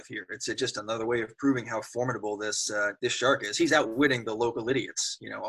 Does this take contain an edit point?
yes; 1 cut; at 3.0 s

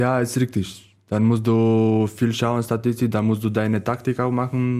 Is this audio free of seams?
yes; 0 cuts

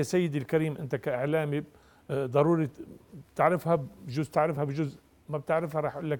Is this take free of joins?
yes; 0 cuts

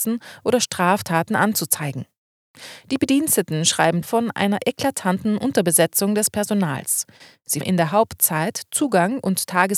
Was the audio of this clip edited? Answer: yes; 2 cuts; at 4.0 s, 7.6 s

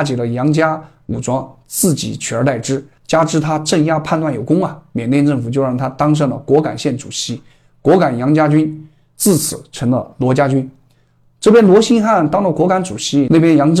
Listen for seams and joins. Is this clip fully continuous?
yes; 0 cuts

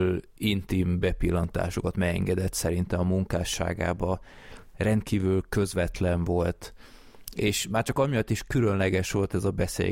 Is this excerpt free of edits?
yes; 0 cuts

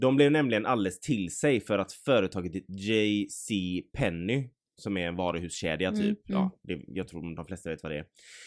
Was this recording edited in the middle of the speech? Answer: no; 0 cuts

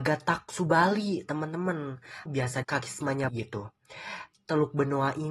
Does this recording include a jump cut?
yes; 3 cuts; at 2.3 s, 2.6 s, 3.3 s

